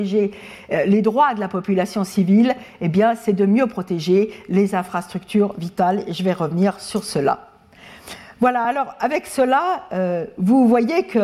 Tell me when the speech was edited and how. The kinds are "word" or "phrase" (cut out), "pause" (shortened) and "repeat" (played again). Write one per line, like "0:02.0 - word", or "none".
none

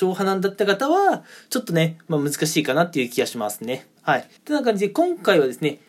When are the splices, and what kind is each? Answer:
0:04.0 - pause
0:04.4 - pause

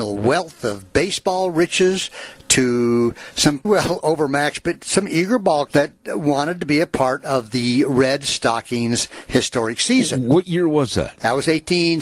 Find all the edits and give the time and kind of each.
0:03.6 - word
0:05.7 - word

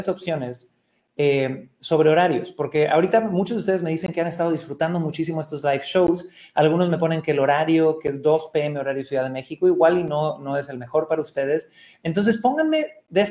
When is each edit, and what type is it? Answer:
none

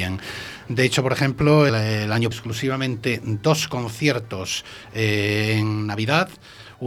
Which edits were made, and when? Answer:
0:01.7 - word
0:02.3 - phrase

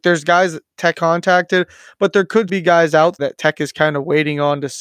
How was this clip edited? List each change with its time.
0:00.9 - word
0:02.5 - word
0:03.2 - word

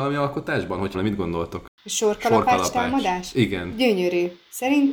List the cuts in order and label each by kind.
0:00.9 - phrase

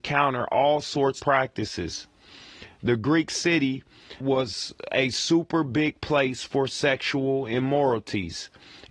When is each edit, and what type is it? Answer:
0:01.2 - phrase
0:04.2 - word

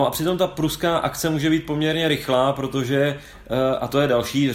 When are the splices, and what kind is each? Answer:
none

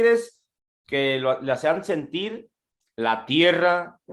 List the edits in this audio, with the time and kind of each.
none

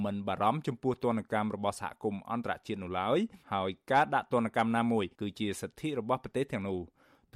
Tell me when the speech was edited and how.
0:03.4 - pause
0:05.1 - pause

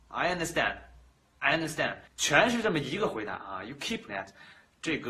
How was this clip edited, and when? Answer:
0:02.1 - pause
0:04.1 - word

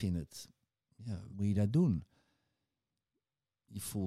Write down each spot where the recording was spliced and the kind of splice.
0:01.3 - word

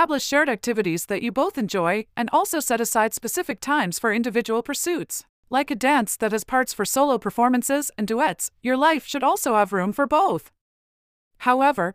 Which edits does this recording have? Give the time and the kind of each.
0:05.3 - pause

